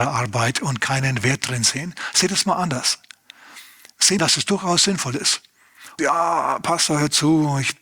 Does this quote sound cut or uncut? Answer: cut